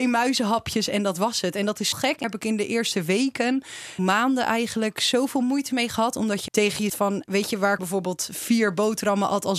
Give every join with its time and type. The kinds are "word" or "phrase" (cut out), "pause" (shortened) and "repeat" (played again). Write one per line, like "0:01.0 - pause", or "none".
0:01.9 - word
0:02.2 - word
0:04.0 - word
0:06.5 - word
0:06.9 - word
0:07.3 - word
0:07.8 - word